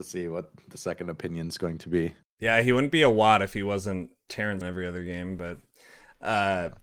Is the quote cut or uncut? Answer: cut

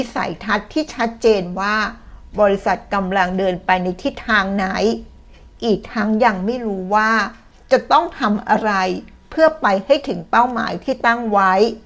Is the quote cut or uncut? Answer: uncut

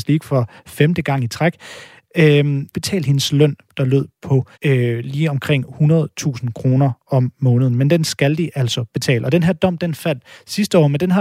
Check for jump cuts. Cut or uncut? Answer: cut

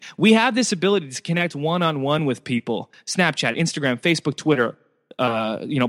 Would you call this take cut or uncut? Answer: uncut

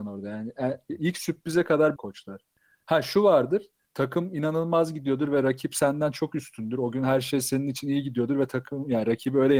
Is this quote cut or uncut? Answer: cut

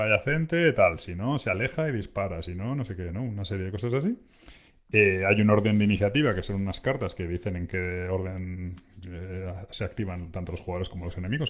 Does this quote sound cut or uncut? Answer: uncut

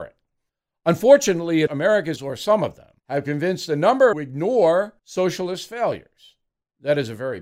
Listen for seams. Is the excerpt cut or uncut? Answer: cut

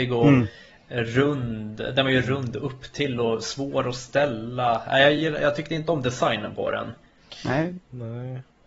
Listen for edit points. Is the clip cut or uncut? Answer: uncut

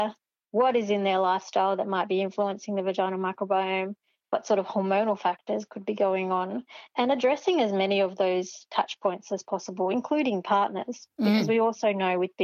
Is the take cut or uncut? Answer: uncut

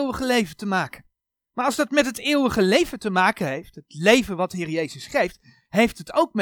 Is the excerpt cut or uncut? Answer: uncut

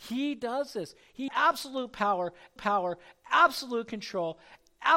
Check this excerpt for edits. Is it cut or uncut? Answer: cut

